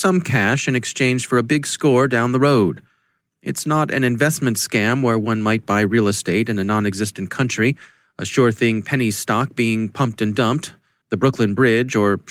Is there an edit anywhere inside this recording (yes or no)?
no